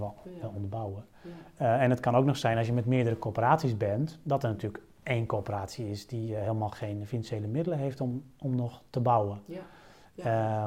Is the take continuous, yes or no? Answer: yes